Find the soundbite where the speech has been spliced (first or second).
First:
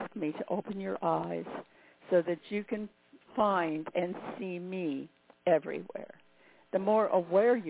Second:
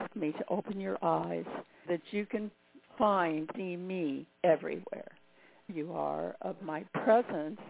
second